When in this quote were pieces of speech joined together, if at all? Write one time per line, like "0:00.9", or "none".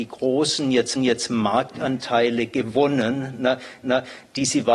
0:01.0
0:03.8